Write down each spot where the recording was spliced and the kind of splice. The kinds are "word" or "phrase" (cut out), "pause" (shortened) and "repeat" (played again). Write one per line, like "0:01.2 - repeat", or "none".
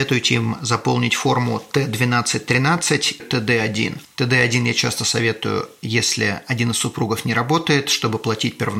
0:03.2 - phrase